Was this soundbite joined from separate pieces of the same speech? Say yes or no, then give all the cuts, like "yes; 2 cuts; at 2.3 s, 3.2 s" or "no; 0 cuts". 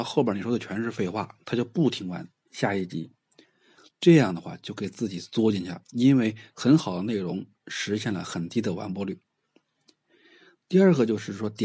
yes; 1 cut; at 5.8 s